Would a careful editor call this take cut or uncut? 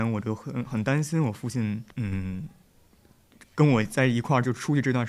cut